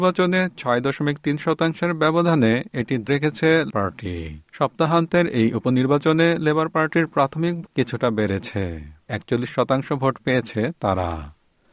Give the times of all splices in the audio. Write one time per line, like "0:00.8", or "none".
0:03.1
0:03.7
0:04.5
0:07.7
0:09.1